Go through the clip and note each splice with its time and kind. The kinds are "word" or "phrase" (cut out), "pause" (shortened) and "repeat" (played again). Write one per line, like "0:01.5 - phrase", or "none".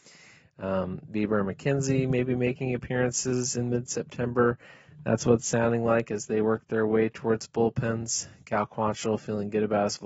none